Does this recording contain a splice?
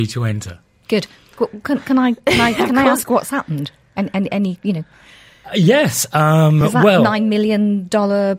no; 0 cuts

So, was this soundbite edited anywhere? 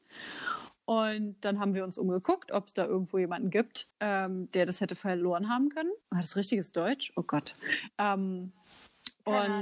yes; 2 cuts; at 3.9 s, 6.0 s

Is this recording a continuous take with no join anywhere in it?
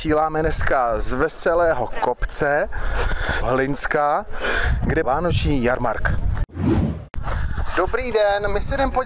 no; 2 cuts; at 3.4 s, 5.0 s

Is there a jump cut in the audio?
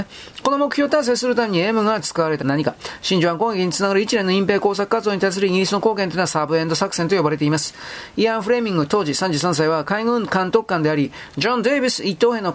yes; 1 cut; at 2.4 s

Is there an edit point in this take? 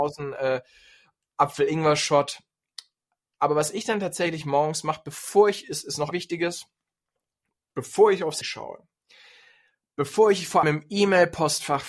yes; 3 cuts; at 6.1 s, 8.4 s, 10.6 s

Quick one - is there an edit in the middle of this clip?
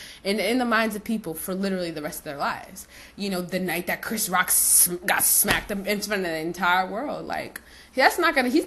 no; 0 cuts

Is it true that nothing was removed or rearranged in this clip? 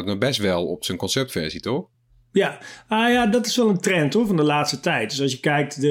yes; 0 cuts

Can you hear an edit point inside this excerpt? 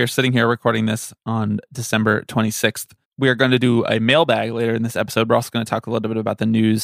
yes; 1 cut; at 3.0 s

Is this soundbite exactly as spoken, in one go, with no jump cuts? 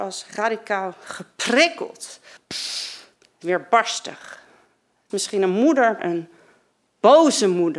no; 4 cuts; at 2.4 s, 3.4 s, 5.1 s, 6.0 s

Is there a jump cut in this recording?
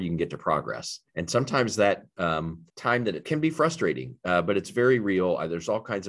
yes; 3 cuts; at 1.1 s, 2.7 s, 3.2 s

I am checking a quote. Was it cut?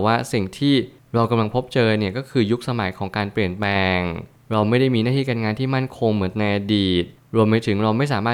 no; 0 cuts

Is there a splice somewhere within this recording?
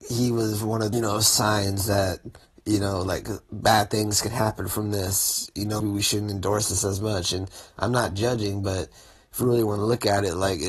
yes; 3 cuts; at 0.9 s, 2.4 s, 5.8 s

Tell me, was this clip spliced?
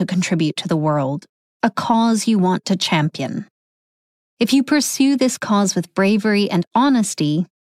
no; 0 cuts

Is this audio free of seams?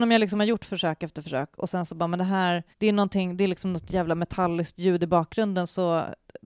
no; 1 cut; at 2.7 s

